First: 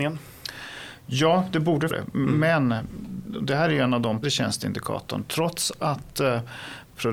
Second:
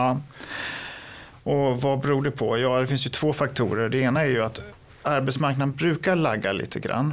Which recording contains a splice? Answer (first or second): first